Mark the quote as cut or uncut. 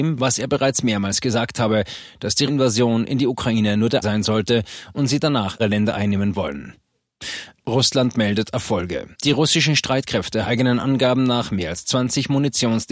cut